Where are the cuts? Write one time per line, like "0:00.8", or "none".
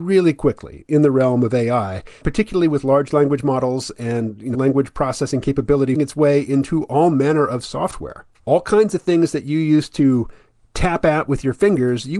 0:02.2
0:04.5
0:06.0
0:08.4